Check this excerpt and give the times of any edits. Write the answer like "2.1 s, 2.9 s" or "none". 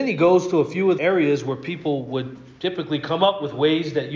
1.0 s